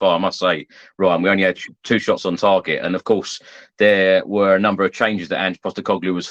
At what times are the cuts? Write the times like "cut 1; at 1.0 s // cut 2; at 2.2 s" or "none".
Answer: none

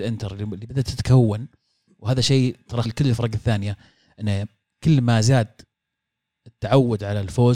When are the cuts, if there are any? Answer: cut 1; at 2.8 s

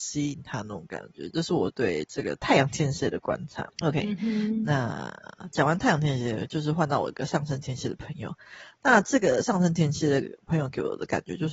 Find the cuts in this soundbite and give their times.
cut 1; at 3.7 s

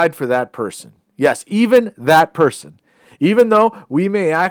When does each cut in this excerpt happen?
none

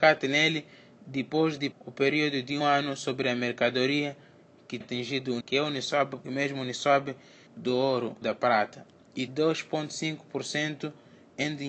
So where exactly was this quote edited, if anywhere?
cut 1; at 1.7 s // cut 2; at 2.6 s // cut 3; at 4.8 s // cut 4; at 5.4 s // cut 5; at 6.2 s // cut 6; at 7.5 s // cut 7; at 8.2 s // cut 8; at 9.3 s

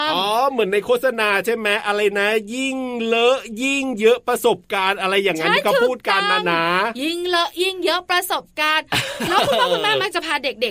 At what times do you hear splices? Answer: none

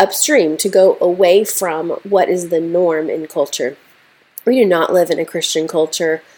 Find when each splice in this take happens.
none

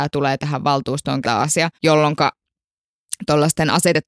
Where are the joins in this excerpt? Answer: cut 1; at 1.2 s // cut 2; at 1.7 s

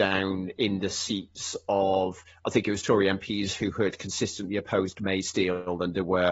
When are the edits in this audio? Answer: none

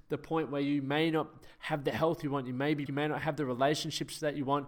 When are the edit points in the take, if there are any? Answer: cut 1; at 2.9 s

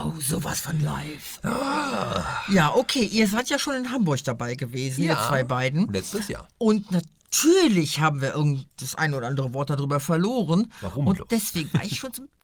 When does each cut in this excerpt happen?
none

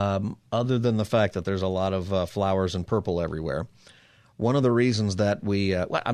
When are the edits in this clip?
none

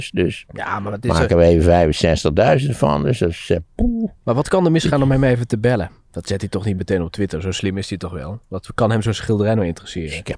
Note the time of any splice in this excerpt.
none

